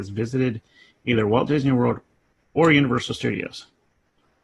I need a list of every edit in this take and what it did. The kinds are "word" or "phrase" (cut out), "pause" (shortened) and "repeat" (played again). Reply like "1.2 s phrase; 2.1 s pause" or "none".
none

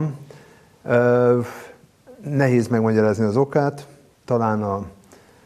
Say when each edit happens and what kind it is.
none

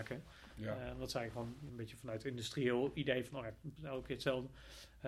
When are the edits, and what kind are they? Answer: 1.7 s word; 3.8 s word

